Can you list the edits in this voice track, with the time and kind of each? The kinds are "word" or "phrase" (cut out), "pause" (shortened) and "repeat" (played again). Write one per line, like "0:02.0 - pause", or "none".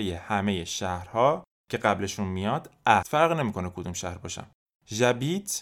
0:03.0 - word